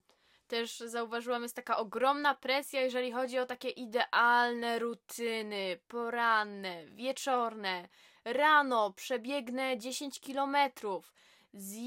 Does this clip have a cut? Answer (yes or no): no